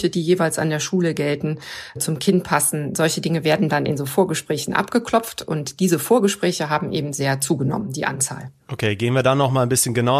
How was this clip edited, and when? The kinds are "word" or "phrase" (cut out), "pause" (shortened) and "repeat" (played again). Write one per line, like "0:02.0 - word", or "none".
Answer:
none